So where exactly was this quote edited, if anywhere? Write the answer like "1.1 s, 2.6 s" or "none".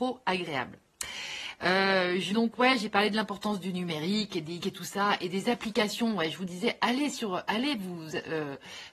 2.3 s, 4.6 s